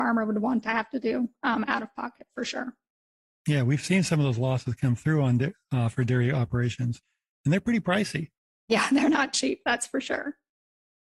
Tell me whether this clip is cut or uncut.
uncut